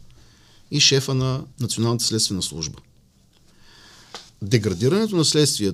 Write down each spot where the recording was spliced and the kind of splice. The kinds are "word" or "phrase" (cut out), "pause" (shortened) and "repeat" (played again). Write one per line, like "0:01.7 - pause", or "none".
0:01.5 - pause
0:04.3 - pause